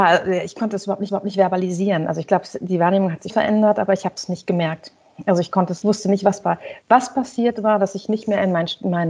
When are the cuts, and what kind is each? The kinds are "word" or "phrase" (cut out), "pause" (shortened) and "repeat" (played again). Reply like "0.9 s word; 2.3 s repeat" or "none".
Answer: 1.1 s repeat; 3.3 s word; 5.8 s word; 6.4 s word; 6.8 s pause